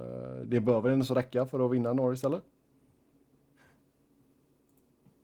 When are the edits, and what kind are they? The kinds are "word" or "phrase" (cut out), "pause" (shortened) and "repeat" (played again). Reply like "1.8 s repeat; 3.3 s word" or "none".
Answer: none